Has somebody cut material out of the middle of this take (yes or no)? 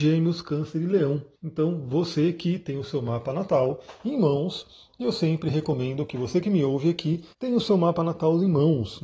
yes